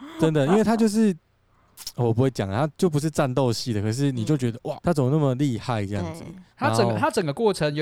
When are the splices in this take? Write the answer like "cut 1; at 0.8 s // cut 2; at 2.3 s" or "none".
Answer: cut 1; at 4.8 s // cut 2; at 6.5 s